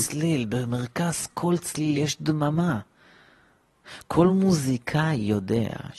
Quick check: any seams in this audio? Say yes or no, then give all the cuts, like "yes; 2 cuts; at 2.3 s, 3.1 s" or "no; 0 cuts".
no; 0 cuts